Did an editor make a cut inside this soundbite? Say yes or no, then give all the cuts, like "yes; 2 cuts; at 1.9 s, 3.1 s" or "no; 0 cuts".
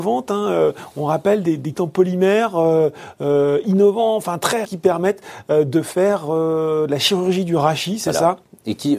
yes; 2 cuts; at 1.7 s, 4.6 s